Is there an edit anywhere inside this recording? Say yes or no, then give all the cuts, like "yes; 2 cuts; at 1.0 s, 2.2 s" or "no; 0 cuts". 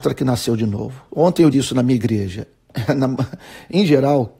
yes; 2 cuts; at 1.1 s, 1.5 s